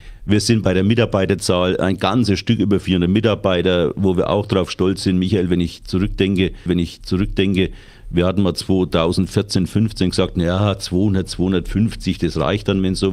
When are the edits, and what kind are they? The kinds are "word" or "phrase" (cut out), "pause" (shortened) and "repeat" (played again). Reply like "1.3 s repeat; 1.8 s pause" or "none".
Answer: 6.7 s repeat